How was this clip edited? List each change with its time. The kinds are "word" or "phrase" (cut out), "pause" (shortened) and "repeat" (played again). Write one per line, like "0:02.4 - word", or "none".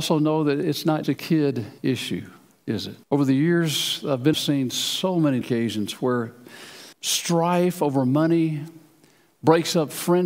0:01.0 - word
0:01.8 - pause
0:03.0 - pause
0:04.3 - phrase
0:05.4 - word
0:06.9 - pause